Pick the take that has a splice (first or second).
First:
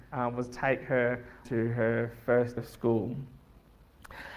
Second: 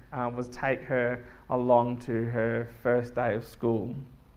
first